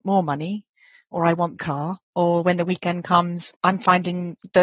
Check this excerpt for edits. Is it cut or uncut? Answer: cut